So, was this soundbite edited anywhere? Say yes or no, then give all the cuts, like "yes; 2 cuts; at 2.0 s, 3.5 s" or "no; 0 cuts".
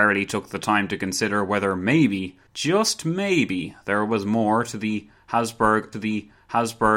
yes; 2 cuts; at 2.5 s, 5.9 s